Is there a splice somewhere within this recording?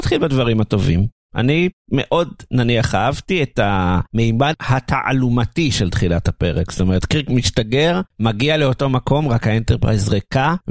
no; 0 cuts

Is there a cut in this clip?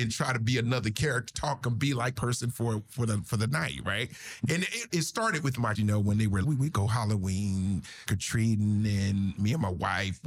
yes; 6 cuts; at 1.6 s, 2.1 s, 4.9 s, 5.7 s, 6.4 s, 8.1 s

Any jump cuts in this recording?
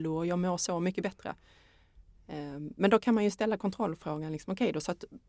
no; 0 cuts

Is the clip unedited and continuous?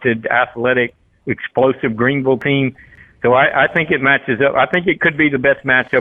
yes; 0 cuts

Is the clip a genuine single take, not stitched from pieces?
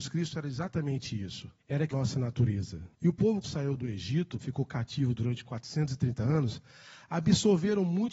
no; 5 cuts; at 1.6 s, 1.9 s, 2.9 s, 3.4 s, 4.4 s

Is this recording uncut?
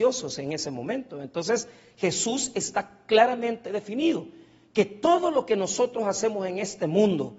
yes; 0 cuts

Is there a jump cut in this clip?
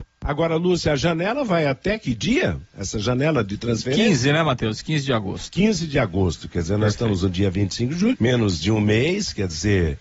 yes; 1 cut; at 8.1 s

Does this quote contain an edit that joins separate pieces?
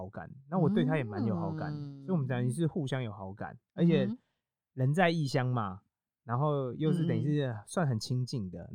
no; 0 cuts

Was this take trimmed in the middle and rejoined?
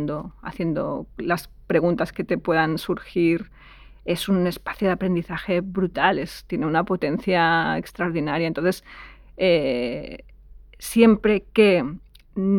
no; 0 cuts

